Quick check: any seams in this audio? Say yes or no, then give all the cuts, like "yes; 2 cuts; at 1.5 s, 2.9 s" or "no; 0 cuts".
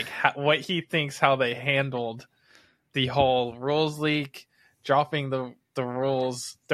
no; 0 cuts